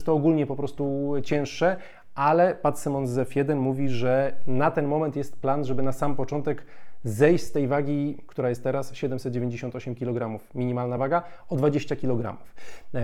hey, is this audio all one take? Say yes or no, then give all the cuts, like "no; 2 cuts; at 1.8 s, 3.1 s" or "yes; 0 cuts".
yes; 0 cuts